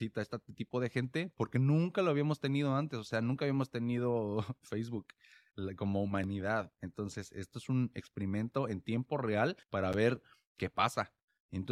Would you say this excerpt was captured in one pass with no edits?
no; 1 cut; at 9.6 s

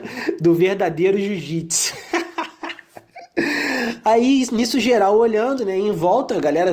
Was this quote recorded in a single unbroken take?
yes; 0 cuts

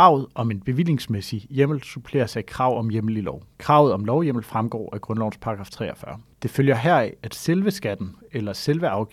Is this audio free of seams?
no; 2 cuts; at 3.5 s, 6.3 s

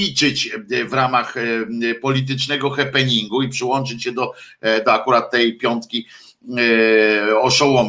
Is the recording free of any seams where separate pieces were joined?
yes; 0 cuts

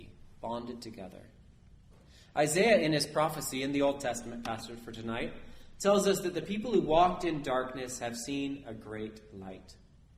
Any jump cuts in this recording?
no; 0 cuts

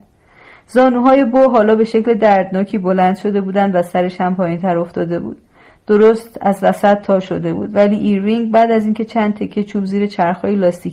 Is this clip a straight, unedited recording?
yes; 0 cuts

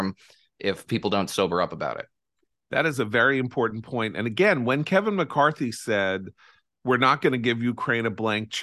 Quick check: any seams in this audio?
no; 0 cuts

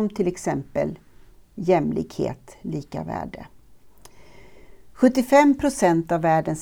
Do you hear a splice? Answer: no; 0 cuts

